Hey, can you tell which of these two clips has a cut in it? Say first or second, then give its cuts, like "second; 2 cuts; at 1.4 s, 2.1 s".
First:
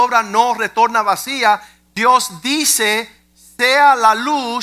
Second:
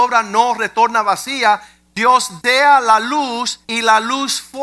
second; 2 cuts; at 2.4 s, 3.6 s